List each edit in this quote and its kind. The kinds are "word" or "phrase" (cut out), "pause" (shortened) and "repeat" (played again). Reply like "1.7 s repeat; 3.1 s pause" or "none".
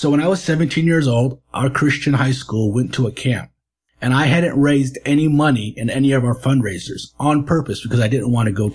none